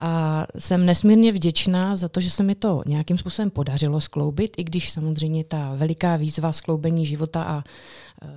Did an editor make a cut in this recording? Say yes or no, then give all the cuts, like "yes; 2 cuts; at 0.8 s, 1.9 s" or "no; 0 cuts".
no; 0 cuts